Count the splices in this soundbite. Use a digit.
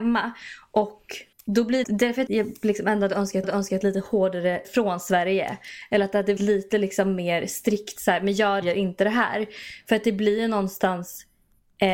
7